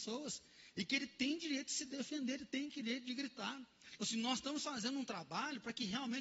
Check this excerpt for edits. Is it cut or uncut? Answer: uncut